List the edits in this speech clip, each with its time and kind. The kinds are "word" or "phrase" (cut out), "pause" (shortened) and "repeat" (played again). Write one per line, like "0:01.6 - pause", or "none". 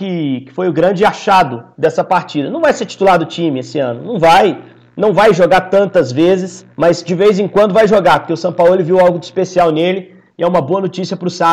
0:06.7 - pause